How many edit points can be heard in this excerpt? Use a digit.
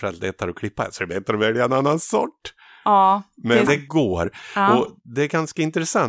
1